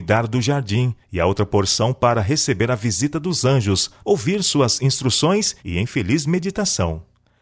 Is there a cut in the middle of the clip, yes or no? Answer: yes